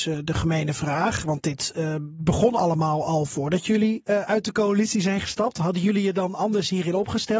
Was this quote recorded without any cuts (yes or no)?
yes